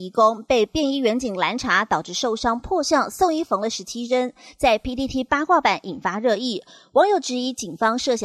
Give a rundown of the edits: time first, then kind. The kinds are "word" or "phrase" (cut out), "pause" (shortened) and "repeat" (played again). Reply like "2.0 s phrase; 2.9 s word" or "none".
none